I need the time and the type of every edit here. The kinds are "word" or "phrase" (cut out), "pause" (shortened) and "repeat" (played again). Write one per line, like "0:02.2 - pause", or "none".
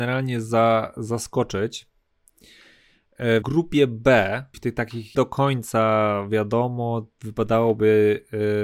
0:03.4 - word
0:04.5 - word
0:05.1 - word